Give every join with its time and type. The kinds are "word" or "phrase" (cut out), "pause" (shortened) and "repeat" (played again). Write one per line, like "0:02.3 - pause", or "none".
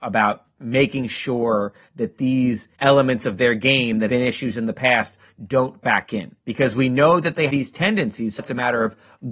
0:02.7 - pause
0:04.1 - word
0:05.8 - word
0:06.4 - pause
0:07.5 - word
0:08.4 - word